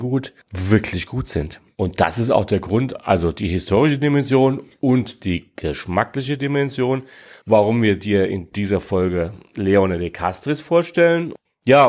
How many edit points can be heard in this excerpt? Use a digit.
0